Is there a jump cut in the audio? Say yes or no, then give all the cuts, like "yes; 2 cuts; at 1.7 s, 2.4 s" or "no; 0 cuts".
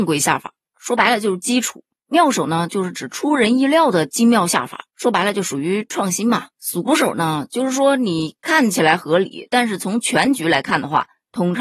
yes; 3 cuts; at 1.9 s, 4.9 s, 6.5 s